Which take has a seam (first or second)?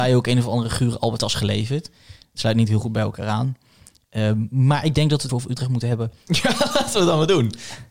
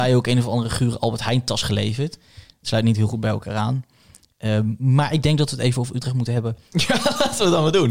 first